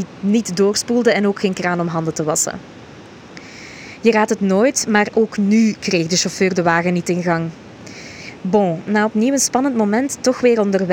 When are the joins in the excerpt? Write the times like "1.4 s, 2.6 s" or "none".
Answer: none